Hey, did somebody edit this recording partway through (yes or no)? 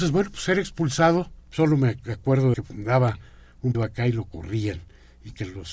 yes